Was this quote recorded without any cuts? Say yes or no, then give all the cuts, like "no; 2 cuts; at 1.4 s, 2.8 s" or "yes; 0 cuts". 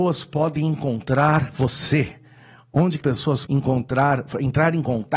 no; 2 cuts; at 3.0 s, 3.5 s